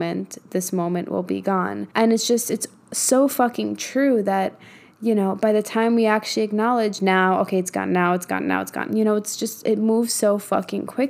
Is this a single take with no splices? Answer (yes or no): no